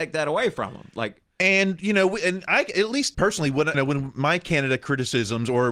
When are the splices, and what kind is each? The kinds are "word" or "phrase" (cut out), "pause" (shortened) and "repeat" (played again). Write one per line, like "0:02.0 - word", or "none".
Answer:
0:03.1 - word
0:03.7 - word